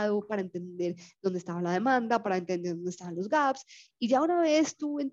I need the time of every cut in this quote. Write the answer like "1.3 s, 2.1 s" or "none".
none